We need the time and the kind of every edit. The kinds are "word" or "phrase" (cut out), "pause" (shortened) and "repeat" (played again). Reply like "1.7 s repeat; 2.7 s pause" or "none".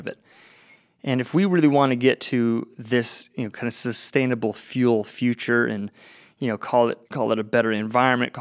7.0 s pause